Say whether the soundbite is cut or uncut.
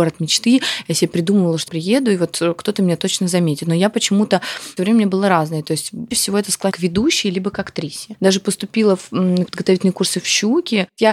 cut